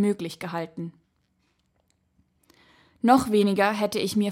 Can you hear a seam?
no; 0 cuts

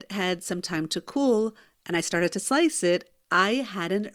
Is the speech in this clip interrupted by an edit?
no; 0 cuts

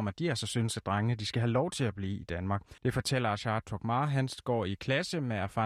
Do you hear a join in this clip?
yes; 1 cut; at 2.8 s

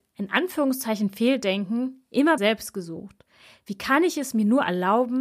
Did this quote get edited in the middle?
yes; 1 cut; at 2.4 s

